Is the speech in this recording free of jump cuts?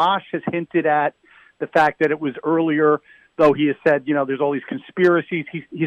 yes; 0 cuts

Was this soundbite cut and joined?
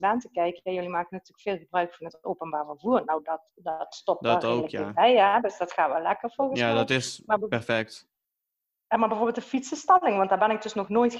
no; 0 cuts

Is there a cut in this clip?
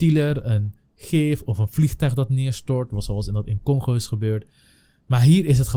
no; 0 cuts

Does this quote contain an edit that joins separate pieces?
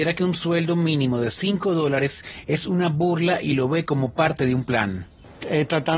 no; 0 cuts

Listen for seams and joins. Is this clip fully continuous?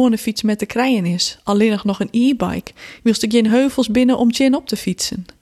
yes; 0 cuts

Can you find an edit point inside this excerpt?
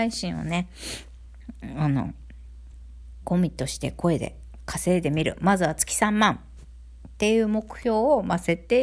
yes; 1 cut; at 3.2 s

